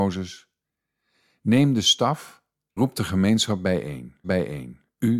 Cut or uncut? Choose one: cut